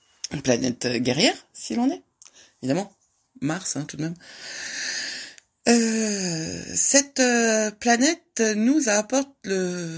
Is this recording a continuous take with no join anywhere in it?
yes; 0 cuts

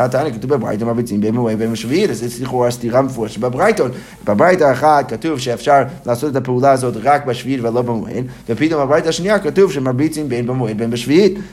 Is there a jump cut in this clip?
no; 0 cuts

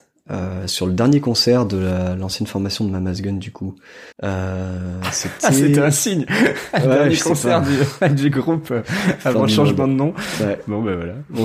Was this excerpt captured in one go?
no; 1 cut; at 4.1 s

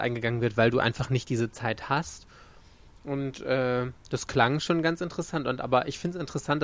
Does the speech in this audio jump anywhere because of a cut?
no; 0 cuts

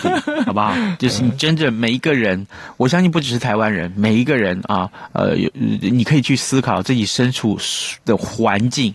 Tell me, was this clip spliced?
no; 0 cuts

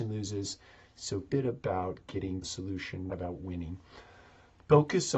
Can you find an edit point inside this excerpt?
yes; 3 cuts; at 1.3 s, 2.4 s, 3.1 s

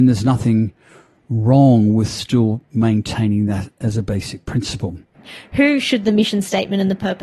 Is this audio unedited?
yes; 0 cuts

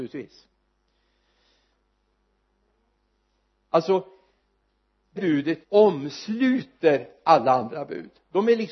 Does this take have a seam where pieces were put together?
yes; 2 cuts; at 5.2 s, 5.6 s

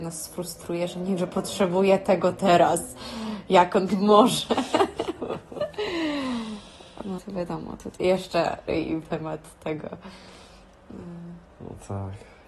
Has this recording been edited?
yes; 6 cuts; at 1.2 s, 3.9 s, 7.2 s, 8.0 s, 8.7 s, 9.0 s

